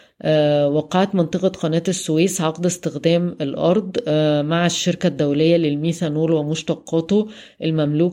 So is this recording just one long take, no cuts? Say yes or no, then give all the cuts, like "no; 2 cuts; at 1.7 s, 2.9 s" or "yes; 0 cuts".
yes; 0 cuts